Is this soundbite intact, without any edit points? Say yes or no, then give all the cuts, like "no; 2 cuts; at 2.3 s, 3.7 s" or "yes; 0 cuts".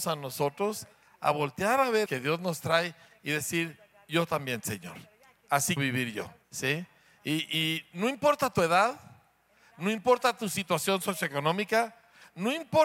no; 3 cuts; at 2.1 s, 5.8 s, 6.4 s